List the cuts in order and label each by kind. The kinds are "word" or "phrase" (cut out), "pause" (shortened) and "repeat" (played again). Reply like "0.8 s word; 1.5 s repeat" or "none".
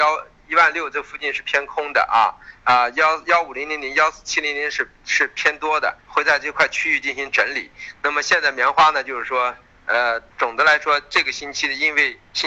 6.0 s pause; 10.3 s pause